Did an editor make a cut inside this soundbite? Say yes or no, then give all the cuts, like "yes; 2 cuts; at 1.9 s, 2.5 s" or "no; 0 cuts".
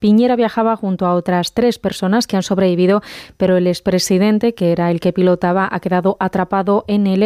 no; 0 cuts